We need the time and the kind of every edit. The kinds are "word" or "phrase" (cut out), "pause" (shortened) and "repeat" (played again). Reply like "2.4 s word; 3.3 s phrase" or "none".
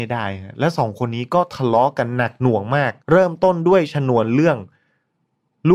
3.0 s pause

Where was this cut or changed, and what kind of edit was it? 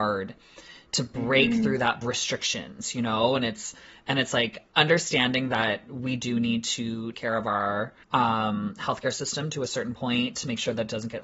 2.0 s phrase; 7.1 s word; 8.0 s pause

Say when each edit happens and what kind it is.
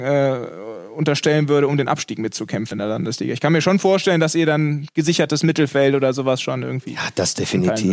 2.7 s word

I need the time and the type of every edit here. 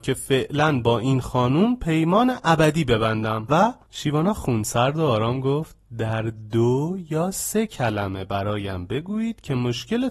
3.8 s pause

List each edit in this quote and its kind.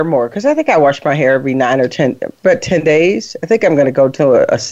none

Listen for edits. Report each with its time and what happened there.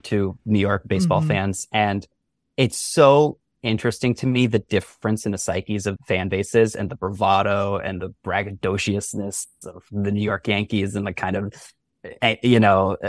6.0 s phrase

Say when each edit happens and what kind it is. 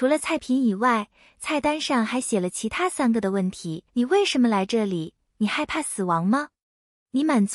3.9 s pause

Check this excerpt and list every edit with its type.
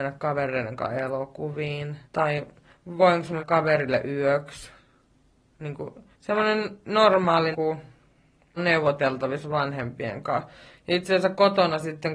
2.1 s pause; 3.4 s word; 6.1 s pause; 7.5 s word; 8.6 s phrase

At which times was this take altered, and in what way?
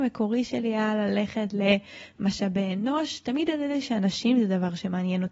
none

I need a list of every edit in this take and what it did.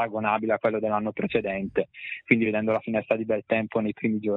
none

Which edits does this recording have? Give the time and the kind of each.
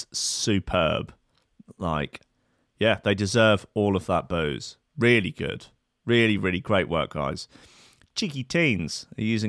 none

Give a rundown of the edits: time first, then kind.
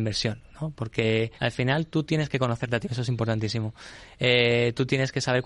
1.4 s pause; 2.8 s word

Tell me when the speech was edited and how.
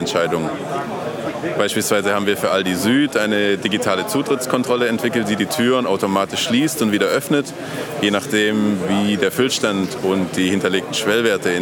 none

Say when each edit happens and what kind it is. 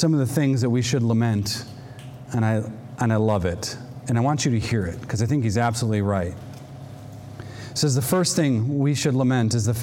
none

